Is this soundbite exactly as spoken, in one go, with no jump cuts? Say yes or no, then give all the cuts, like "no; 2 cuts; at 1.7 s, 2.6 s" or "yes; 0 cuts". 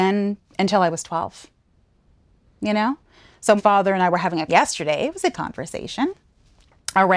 no; 3 cuts; at 3.6 s, 4.5 s, 5.3 s